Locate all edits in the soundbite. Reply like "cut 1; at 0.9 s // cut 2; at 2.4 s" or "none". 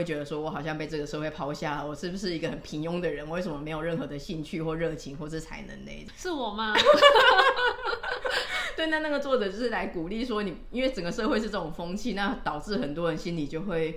none